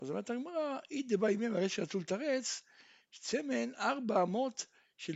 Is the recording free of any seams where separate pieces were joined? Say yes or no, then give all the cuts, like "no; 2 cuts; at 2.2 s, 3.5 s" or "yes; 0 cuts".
yes; 0 cuts